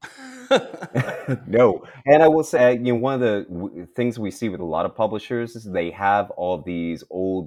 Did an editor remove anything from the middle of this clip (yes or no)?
no